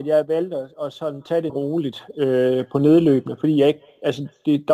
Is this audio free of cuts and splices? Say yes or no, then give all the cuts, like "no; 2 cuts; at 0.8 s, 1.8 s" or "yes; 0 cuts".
no; 1 cut; at 1.5 s